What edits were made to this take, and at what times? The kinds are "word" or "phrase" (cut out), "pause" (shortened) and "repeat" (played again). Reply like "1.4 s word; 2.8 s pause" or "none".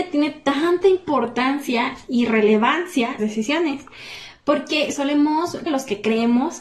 3.2 s phrase; 5.7 s word